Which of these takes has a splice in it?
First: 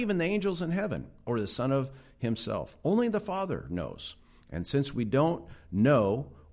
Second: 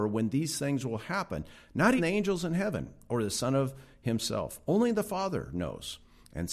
second; 1 cut; at 2.0 s

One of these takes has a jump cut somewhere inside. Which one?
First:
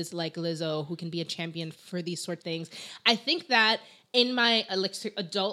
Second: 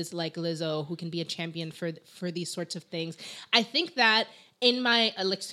first; 2 cuts; at 1.7 s, 2.4 s

